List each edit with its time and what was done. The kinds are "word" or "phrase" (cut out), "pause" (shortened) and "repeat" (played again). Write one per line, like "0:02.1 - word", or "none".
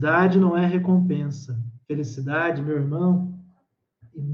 0:01.8 - pause